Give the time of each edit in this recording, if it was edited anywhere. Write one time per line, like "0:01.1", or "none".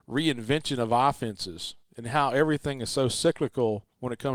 none